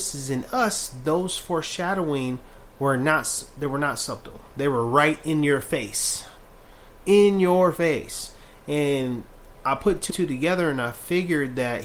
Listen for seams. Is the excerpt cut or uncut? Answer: cut